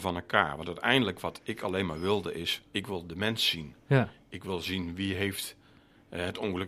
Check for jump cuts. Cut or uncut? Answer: cut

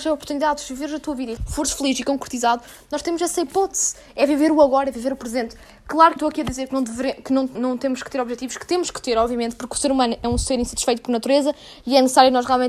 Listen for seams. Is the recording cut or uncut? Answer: cut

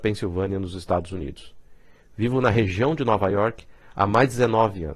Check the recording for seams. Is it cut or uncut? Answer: uncut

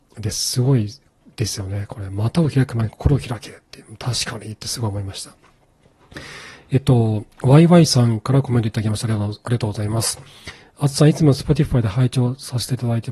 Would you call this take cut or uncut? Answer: uncut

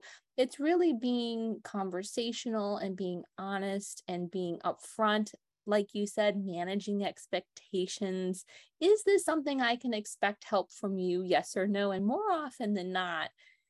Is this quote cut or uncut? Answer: uncut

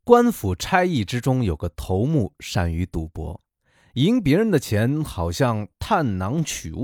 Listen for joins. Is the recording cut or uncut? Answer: uncut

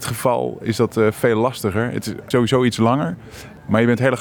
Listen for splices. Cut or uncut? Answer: uncut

